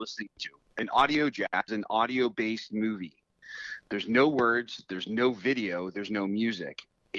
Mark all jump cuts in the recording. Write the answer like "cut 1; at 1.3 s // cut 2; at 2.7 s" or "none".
cut 1; at 1.7 s